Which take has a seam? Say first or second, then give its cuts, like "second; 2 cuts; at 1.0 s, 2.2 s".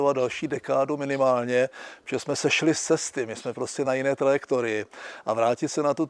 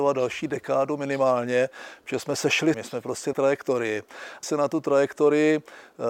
second; 3 cuts; at 2.7 s, 3.3 s, 4.4 s